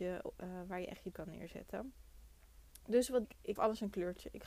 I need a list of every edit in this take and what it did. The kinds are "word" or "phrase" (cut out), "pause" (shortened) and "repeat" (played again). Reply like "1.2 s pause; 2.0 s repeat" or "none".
1.1 s word; 3.2 s word; 3.6 s word